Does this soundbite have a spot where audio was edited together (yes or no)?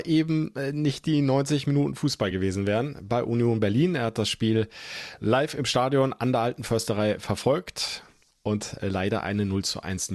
no